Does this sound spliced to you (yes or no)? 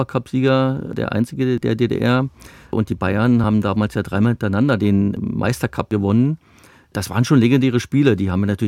no